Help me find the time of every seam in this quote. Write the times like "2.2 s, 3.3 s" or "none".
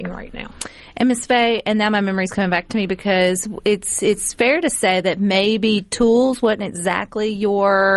none